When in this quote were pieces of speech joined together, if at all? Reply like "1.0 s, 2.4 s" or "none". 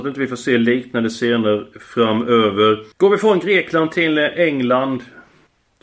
2.9 s